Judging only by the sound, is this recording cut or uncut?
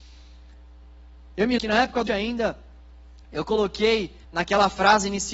cut